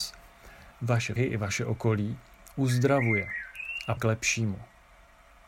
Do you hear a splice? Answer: yes; 2 cuts; at 1.2 s, 4.0 s

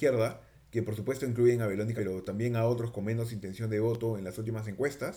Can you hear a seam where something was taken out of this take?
yes; 1 cut; at 2.0 s

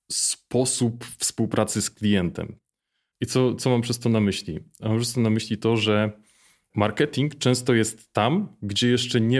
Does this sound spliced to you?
no; 0 cuts

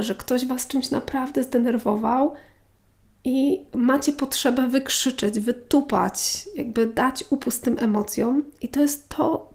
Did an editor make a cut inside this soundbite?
no; 0 cuts

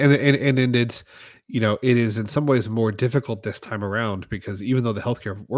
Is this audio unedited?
yes; 0 cuts

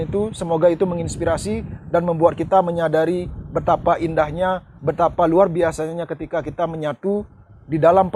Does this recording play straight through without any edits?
no; 1 cut; at 4.8 s

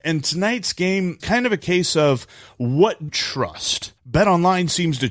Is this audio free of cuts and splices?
no; 3 cuts; at 1.2 s, 3.1 s, 4.0 s

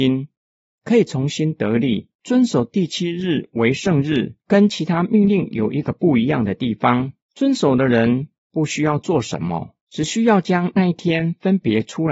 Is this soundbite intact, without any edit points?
no; 3 cuts; at 2.1 s, 4.4 s, 9.8 s

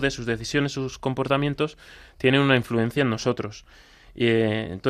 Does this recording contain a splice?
no; 0 cuts

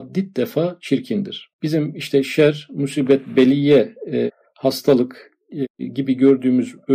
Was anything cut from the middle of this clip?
yes; 1 cut; at 1.5 s

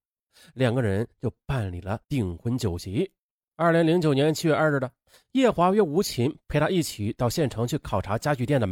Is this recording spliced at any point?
yes; 2 cuts; at 2.0 s, 3.4 s

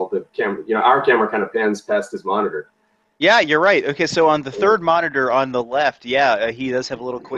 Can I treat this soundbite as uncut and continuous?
yes; 0 cuts

